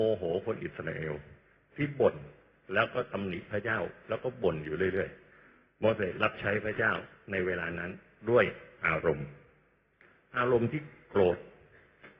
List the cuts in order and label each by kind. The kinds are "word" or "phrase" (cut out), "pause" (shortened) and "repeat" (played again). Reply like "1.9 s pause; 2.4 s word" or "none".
none